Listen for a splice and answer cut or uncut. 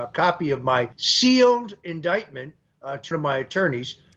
cut